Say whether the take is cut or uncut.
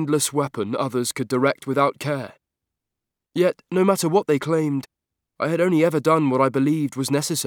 uncut